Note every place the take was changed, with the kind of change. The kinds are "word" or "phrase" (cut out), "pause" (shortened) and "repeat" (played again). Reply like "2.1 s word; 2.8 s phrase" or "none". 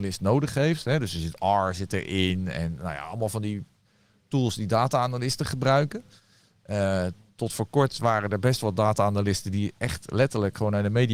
none